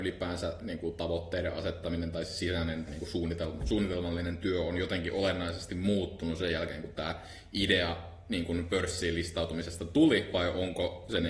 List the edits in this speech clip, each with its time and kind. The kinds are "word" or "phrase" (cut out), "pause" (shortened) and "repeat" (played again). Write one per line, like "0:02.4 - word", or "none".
0:02.9 - word

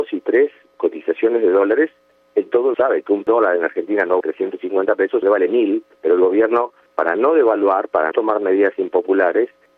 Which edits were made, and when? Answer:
0:02.7 - word
0:04.2 - word
0:05.2 - word
0:08.1 - word

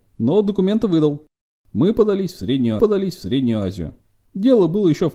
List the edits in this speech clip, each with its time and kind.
0:02.8 - repeat

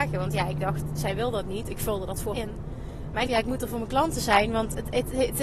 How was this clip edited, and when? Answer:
0:02.3 - word
0:03.3 - phrase

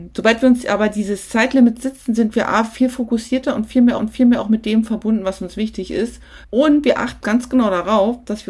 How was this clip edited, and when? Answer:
0:04.0 - repeat
0:06.4 - pause
0:07.2 - word

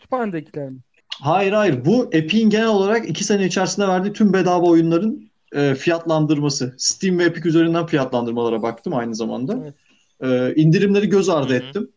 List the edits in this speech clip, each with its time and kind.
none

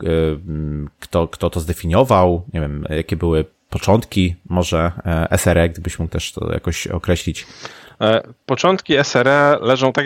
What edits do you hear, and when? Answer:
none

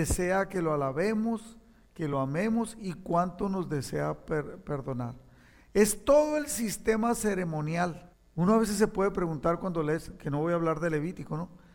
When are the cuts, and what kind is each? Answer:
none

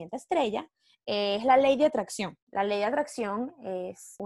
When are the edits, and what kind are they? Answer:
0:02.4 - pause

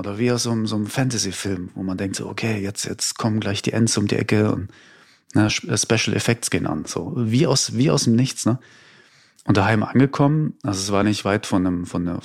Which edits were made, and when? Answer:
none

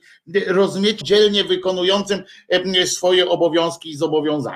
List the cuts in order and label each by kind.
0:01.0 - word

